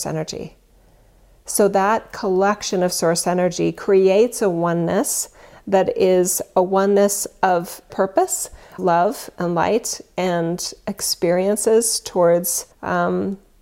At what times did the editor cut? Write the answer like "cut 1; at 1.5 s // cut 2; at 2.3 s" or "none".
cut 1; at 7.9 s // cut 2; at 8.8 s // cut 3; at 12.7 s